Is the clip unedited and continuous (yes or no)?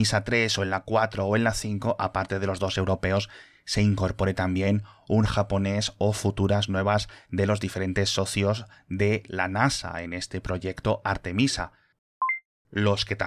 no